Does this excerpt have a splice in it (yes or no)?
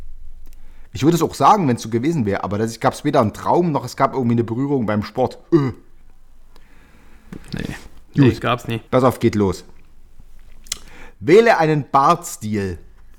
yes